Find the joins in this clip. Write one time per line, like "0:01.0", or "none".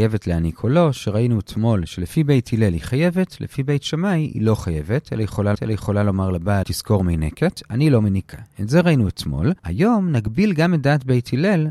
0:05.5
0:06.6
0:09.6